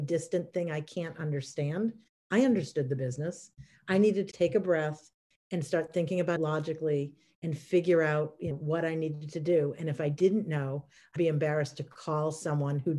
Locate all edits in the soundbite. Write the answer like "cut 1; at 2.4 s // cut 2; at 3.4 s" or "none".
cut 1; at 4.3 s // cut 2; at 6.4 s // cut 3; at 8.5 s // cut 4; at 11.2 s